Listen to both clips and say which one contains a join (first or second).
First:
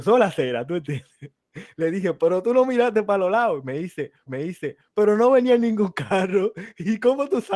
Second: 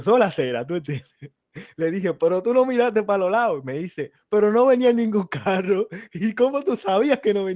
first